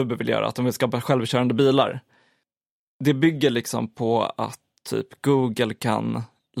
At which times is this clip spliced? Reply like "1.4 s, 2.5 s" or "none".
none